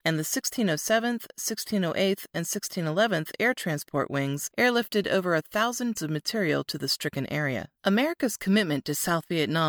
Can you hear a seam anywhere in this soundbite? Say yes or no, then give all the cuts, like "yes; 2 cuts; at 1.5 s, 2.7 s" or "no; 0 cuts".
yes; 2 cuts; at 5.9 s, 7.7 s